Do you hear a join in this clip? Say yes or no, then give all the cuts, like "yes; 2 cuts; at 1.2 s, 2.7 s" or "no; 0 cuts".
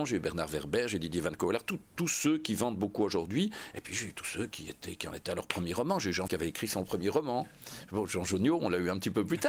yes; 1 cut; at 6.3 s